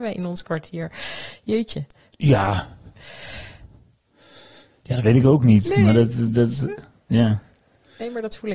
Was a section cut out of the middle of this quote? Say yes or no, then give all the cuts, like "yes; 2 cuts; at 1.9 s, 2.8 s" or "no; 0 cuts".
no; 0 cuts